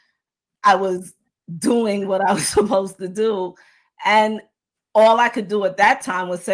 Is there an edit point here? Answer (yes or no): no